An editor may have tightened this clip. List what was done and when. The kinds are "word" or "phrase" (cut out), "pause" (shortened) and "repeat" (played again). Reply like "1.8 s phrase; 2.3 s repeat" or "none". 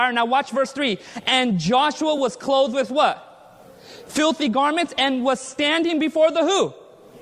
none